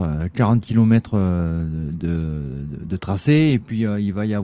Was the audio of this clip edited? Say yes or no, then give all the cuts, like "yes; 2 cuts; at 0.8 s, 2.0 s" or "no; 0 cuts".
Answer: yes; 1 cut; at 2.8 s